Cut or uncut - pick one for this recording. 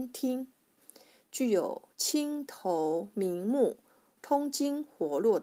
uncut